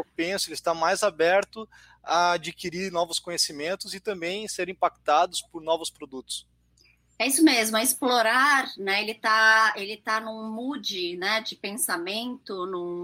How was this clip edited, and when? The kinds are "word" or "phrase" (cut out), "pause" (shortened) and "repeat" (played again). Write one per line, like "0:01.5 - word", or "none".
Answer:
none

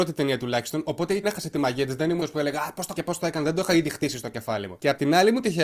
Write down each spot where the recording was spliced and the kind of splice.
0:01.2 - phrase
0:02.2 - word
0:02.9 - word

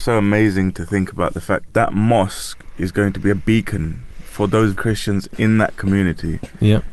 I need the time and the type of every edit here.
0:01.7 - word
0:04.7 - word

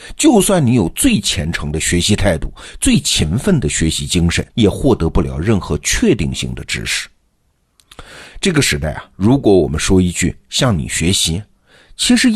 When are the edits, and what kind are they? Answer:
0:04.5 - pause

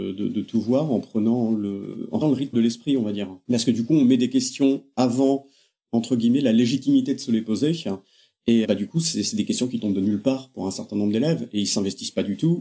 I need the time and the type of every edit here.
0:02.2 - word
0:02.5 - word
0:08.6 - word

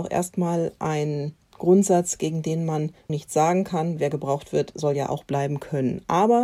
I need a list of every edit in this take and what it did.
0:03.1 - word
0:04.0 - word

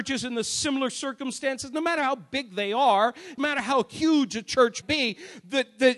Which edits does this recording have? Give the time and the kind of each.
0:03.4 - word
0:04.8 - word

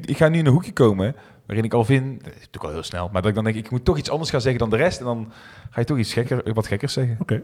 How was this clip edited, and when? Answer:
none

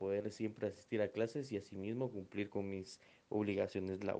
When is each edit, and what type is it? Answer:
none

